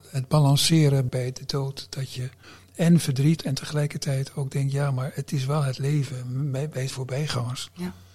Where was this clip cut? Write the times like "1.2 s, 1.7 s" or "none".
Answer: 1.1 s, 2.4 s, 3.4 s, 6.9 s